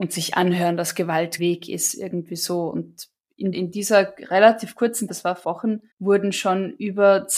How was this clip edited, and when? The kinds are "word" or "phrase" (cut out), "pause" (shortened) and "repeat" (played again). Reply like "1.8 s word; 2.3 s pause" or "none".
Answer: 1.4 s word; 3.5 s word; 5.1 s word; 5.4 s phrase; 5.9 s pause

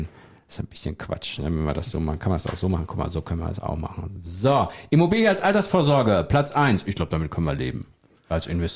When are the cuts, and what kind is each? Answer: none

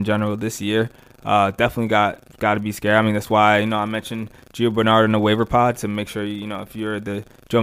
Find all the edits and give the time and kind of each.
none

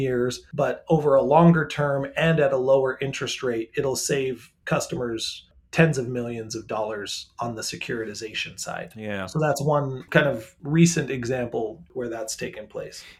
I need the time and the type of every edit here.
none

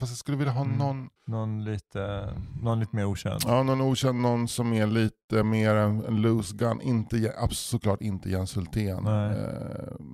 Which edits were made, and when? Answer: 1.2 s pause

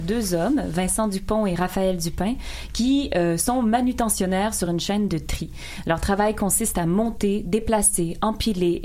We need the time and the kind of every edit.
none

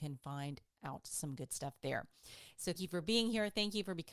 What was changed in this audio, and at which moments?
2.8 s word

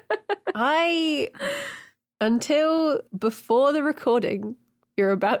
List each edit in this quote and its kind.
3.1 s pause

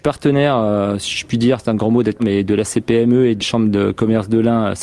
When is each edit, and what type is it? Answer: 2.2 s word; 3.4 s word

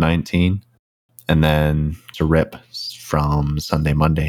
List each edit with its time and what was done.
2.1 s word

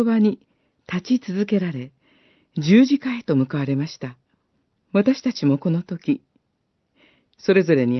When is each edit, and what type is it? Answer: 4.5 s pause

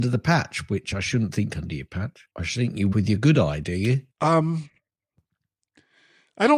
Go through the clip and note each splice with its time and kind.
1.5 s phrase; 2.3 s pause; 2.9 s word; 4.1 s pause

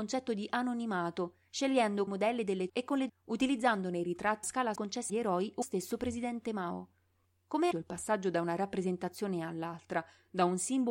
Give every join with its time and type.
2.1 s word; 2.7 s word; 3.1 s word; 4.4 s word; 4.7 s word; 5.1 s word; 5.6 s word; 7.7 s word

